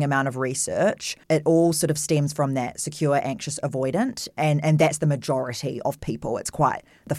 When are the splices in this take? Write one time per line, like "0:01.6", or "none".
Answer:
0:01.2